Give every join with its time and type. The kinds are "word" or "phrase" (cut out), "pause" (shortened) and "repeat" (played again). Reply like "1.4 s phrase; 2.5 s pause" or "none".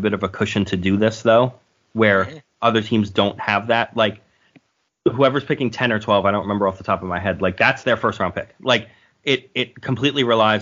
2.5 s pause